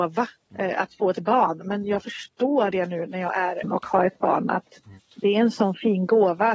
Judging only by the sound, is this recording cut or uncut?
cut